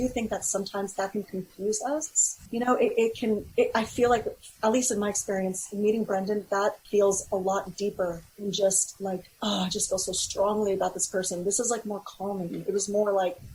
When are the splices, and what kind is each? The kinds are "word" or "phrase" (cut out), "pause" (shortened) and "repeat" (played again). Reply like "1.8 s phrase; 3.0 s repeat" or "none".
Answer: 2.5 s pause; 3.5 s pause; 6.8 s pause; 8.3 s pause